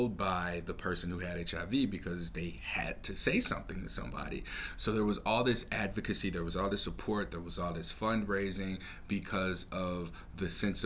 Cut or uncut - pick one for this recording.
uncut